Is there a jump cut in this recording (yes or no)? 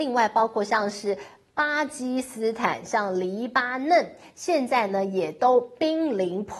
no